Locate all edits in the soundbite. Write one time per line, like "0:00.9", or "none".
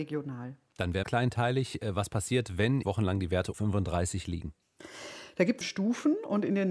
0:01.0
0:02.8
0:03.5
0:05.6